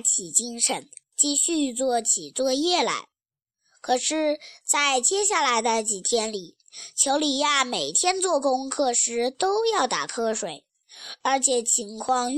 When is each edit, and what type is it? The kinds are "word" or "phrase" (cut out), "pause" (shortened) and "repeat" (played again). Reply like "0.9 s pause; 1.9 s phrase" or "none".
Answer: none